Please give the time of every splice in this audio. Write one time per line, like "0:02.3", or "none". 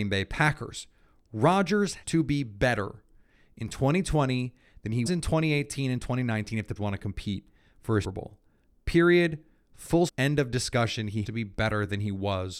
0:02.0
0:05.1
0:06.8
0:08.0
0:10.1
0:11.2